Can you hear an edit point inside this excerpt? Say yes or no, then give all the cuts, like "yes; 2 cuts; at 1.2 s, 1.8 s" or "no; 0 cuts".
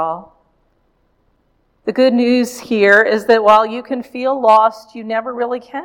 no; 0 cuts